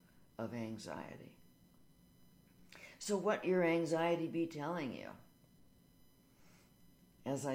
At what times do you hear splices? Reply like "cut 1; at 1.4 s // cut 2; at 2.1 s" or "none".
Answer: cut 1; at 3.4 s